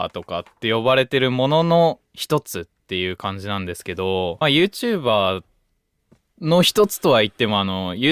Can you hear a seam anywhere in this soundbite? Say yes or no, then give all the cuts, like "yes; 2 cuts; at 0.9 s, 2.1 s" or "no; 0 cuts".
yes; 1 cut; at 4.4 s